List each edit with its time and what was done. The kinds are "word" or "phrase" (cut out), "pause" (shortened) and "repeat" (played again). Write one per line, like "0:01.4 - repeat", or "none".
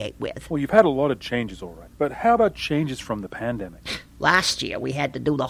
none